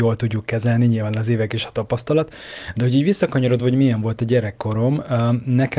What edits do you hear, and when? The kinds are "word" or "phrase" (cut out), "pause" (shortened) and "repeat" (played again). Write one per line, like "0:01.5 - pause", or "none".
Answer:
none